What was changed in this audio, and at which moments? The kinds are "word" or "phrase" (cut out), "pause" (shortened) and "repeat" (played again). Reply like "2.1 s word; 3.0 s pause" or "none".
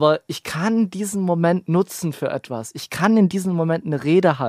none